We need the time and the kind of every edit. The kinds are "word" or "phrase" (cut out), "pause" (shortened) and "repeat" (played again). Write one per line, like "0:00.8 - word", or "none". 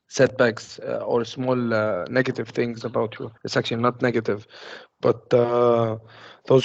0:03.4 - pause